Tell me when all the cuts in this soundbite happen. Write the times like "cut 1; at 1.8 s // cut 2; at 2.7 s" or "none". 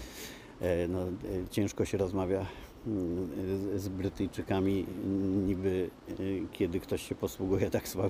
none